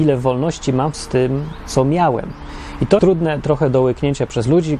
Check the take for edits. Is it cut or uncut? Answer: cut